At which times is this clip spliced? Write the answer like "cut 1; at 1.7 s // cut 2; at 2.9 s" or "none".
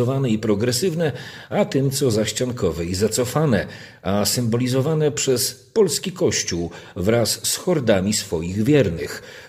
none